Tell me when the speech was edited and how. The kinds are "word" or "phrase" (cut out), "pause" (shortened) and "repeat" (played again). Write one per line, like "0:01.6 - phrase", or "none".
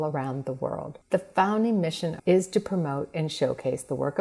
0:01.0 - pause
0:02.2 - phrase